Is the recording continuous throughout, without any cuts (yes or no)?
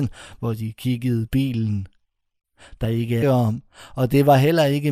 no